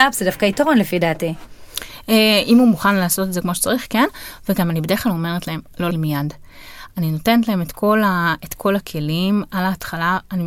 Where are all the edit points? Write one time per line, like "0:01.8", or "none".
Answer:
0:05.9